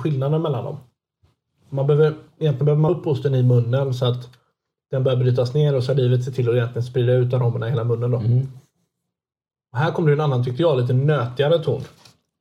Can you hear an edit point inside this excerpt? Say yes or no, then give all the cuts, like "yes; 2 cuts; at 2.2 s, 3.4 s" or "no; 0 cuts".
yes; 1 cut; at 2.9 s